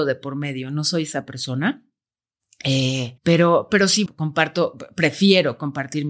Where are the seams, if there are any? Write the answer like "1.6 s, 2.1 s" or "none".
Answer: 3.2 s, 4.1 s

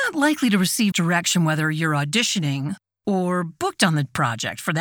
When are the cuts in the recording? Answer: 0.9 s

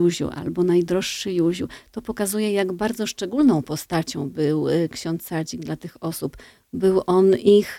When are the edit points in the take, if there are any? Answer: none

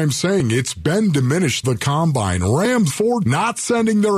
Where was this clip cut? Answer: 1.6 s, 2.9 s, 3.2 s

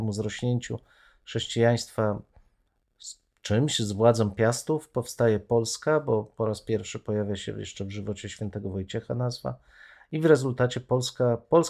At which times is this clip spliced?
none

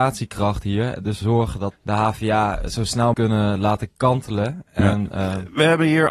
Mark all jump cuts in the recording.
1.2 s, 1.7 s, 3.1 s

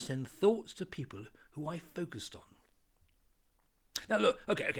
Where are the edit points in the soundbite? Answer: none

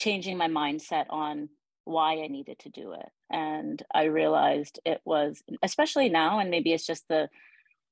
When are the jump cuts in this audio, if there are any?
none

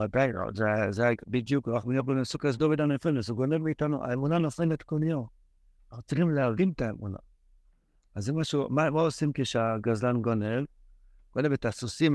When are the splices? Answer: none

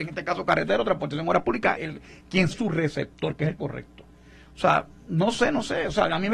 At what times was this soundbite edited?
1.7 s, 2.5 s, 3.6 s

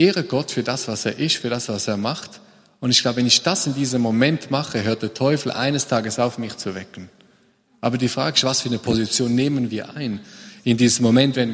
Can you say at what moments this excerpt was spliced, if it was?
none

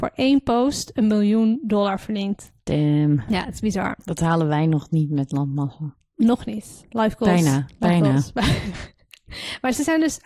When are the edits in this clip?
2.6 s

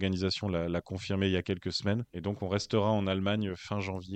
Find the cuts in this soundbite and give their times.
2.1 s

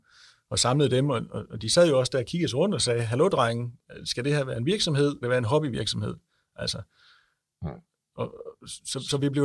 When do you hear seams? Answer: 5.2 s

